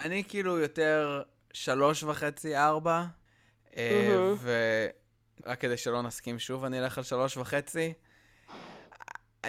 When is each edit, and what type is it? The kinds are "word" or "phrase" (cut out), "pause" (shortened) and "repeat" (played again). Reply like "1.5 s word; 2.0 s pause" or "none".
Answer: 5.4 s word